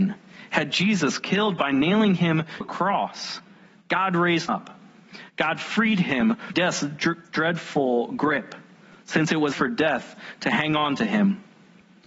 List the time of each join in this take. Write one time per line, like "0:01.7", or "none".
0:02.6
0:04.5
0:06.5
0:09.5